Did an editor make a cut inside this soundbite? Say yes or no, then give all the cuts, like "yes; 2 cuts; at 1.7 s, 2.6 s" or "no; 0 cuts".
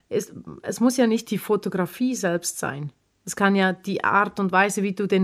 no; 0 cuts